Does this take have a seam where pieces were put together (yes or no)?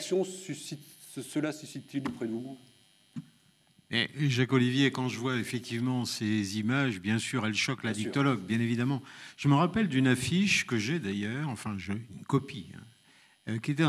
no